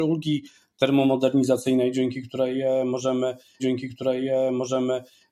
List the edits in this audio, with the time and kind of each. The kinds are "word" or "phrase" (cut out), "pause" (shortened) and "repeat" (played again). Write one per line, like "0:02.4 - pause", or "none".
0:03.6 - repeat